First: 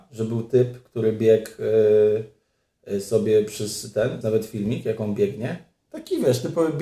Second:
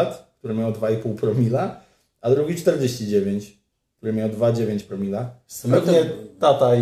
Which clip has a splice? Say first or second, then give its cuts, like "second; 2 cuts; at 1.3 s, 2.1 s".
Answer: first; 1 cut; at 4.2 s